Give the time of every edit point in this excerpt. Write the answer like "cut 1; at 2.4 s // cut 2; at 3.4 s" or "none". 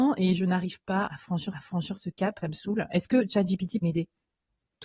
cut 1; at 1.1 s // cut 2; at 1.5 s // cut 3; at 2.4 s // cut 4; at 3.8 s